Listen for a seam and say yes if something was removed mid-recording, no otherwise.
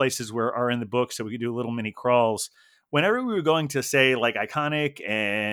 no